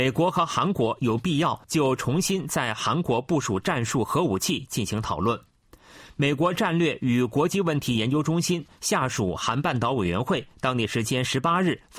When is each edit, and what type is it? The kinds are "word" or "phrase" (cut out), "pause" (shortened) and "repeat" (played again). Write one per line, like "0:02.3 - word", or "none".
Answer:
0:01.6 - pause